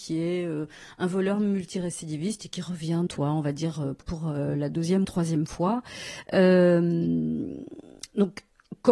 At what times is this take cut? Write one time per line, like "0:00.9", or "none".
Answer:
0:03.1
0:04.0
0:05.0

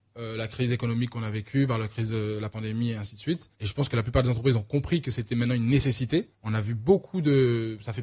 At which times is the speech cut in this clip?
0:03.5
0:06.3

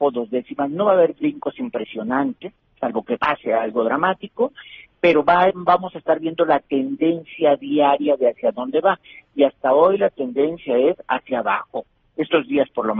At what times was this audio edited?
0:04.8
0:05.5

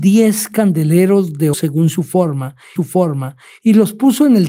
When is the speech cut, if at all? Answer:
0:01.5
0:02.8

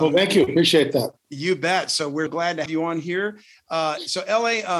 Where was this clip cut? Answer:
0:02.3
0:02.7

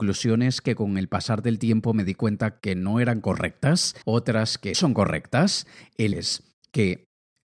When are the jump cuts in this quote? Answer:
0:04.0
0:04.7
0:06.1

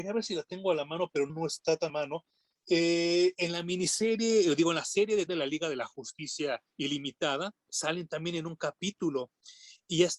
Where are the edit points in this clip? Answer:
0:01.3
0:01.9
0:05.3
0:06.7

